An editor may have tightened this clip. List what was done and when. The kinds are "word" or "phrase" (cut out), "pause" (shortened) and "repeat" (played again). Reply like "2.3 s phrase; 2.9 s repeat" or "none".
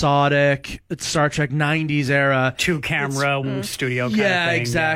3.4 s word